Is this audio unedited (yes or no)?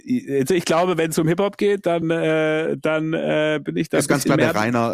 yes